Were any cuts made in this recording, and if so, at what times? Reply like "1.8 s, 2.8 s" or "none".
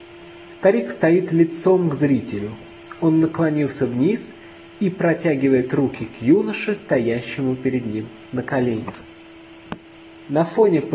none

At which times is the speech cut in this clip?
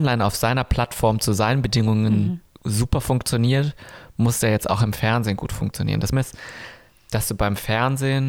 6.1 s

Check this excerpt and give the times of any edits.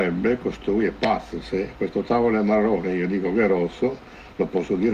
none

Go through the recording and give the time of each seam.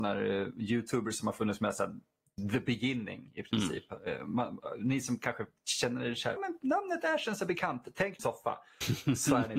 6.4 s, 8.2 s

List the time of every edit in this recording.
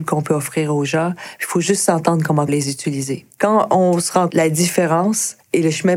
2.5 s, 3.3 s, 4.3 s

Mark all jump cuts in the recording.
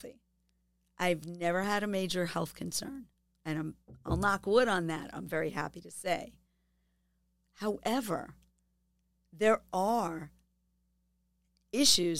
none

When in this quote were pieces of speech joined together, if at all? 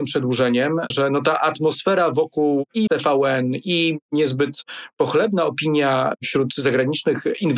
0.9 s, 2.9 s

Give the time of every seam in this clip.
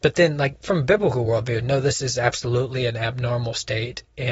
none

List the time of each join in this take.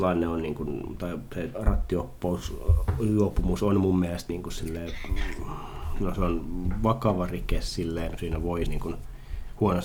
1.5 s, 4.3 s, 8.2 s, 8.7 s

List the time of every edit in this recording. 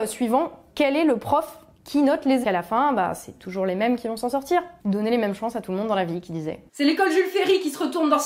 2.4 s

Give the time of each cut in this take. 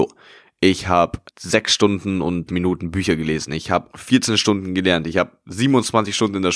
1.3 s, 2.5 s

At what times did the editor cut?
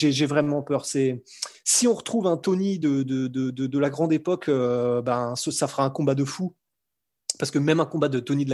none

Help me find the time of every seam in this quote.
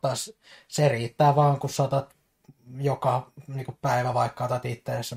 none

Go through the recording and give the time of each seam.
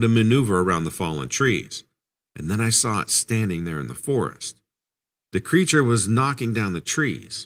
none

